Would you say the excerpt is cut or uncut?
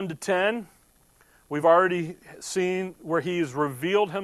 uncut